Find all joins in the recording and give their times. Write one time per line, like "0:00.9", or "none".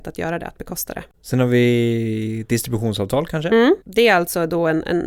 0:01.1
0:03.8